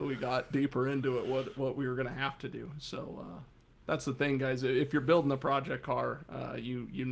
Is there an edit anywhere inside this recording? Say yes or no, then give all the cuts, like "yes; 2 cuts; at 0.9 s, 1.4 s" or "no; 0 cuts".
no; 0 cuts